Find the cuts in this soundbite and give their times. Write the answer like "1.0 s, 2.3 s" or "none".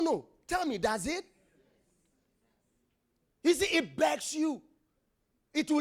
none